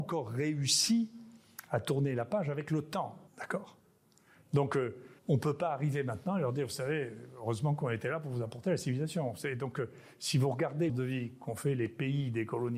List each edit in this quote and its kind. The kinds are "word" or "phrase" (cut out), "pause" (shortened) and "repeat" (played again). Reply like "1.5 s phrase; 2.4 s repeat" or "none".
3.3 s pause; 5.2 s pause; 10.9 s phrase